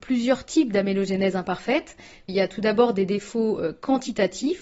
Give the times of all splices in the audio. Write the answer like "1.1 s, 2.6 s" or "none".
none